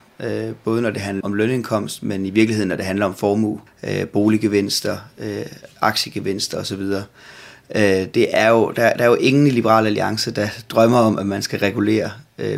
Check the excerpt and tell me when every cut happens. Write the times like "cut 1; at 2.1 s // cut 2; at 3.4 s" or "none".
cut 1; at 1.2 s // cut 2; at 3.7 s // cut 3; at 8.1 s